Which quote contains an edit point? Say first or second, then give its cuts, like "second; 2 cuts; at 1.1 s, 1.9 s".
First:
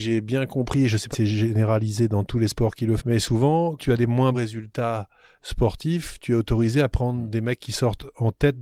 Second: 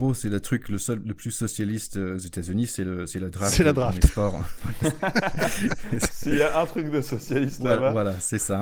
first; 4 cuts; at 1.1 s, 3.0 s, 3.8 s, 4.3 s